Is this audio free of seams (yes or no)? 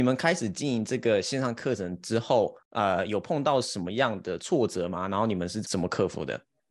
no